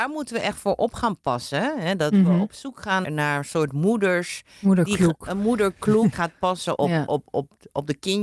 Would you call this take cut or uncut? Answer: cut